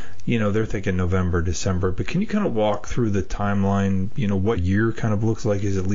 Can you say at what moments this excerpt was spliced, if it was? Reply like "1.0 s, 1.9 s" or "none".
4.6 s